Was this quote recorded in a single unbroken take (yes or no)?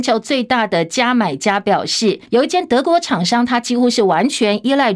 no